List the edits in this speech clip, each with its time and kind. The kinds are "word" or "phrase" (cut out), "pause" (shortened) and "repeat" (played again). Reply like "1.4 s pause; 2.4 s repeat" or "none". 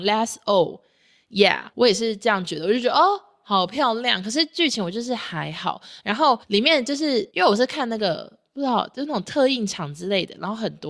1.7 s pause; 6.4 s pause; 7.3 s pause